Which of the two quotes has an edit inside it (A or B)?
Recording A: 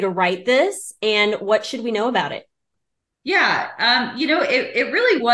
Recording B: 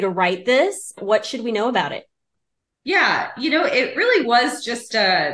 B